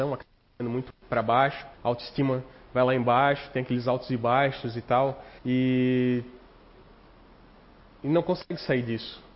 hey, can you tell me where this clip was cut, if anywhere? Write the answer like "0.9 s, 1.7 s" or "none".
1.7 s, 5.4 s